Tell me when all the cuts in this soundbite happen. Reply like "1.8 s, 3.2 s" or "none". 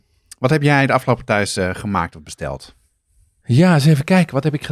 none